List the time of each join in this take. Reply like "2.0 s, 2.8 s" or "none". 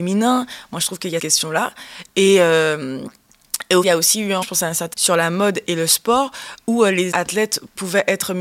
1.2 s, 3.8 s, 4.4 s, 4.9 s, 7.1 s

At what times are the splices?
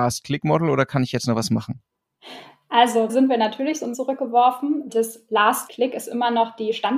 3.1 s, 3.9 s, 4.9 s, 5.7 s

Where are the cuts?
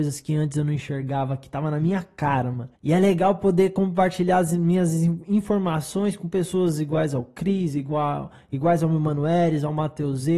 2.8 s

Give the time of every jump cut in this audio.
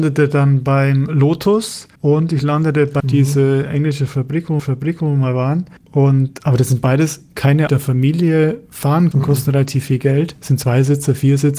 2.0 s, 3.0 s, 4.6 s, 5.8 s, 7.7 s, 9.1 s

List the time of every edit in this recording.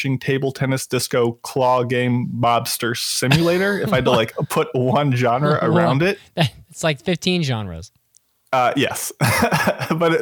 none

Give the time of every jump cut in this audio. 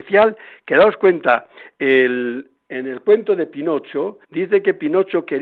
4.2 s

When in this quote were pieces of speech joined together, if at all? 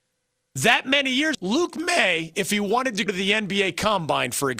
1.3 s, 3.1 s

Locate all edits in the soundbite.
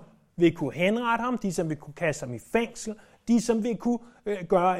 none

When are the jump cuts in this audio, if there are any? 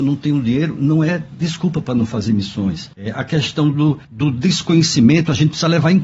2.9 s, 4.0 s

